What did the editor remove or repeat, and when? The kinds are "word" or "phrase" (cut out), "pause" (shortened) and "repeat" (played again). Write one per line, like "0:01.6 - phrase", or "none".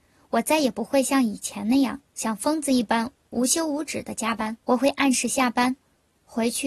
0:02.1 - pause
0:04.6 - pause